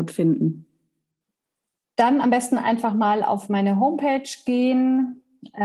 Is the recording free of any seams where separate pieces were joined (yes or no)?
yes